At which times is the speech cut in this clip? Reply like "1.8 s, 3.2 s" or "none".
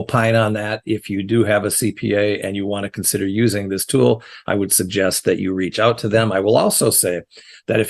none